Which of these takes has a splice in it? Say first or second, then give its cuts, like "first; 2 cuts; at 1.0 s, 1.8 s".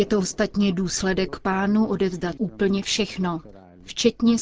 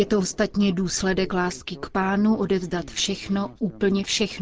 first; 2 cuts; at 1.3 s, 2.4 s